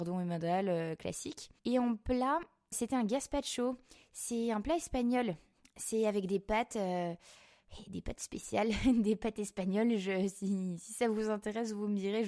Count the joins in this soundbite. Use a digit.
3